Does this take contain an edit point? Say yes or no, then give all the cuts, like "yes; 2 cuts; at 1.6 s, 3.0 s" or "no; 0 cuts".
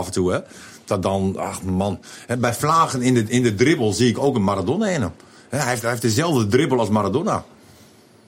no; 0 cuts